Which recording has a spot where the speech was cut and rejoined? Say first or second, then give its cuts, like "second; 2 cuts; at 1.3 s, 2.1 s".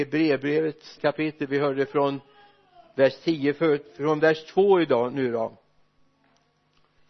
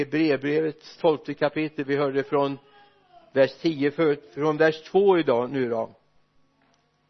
first; 1 cut; at 1.0 s